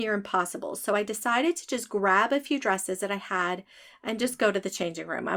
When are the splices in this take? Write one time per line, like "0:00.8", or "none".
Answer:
none

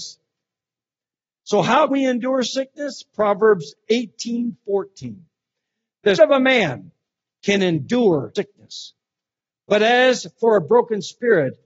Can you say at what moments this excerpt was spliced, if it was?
0:01.9
0:06.2
0:08.3

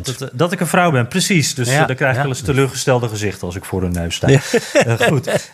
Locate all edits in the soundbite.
none

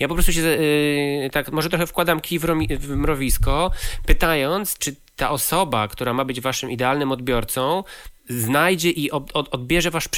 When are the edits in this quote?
0:04.8

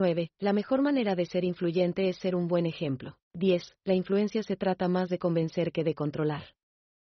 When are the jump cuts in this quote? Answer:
0:03.2

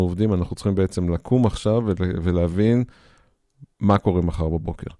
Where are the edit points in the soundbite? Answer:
0:03.7

